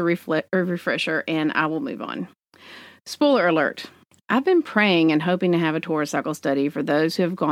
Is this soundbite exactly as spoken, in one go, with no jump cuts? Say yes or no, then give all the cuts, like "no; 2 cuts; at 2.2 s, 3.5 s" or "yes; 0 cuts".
yes; 0 cuts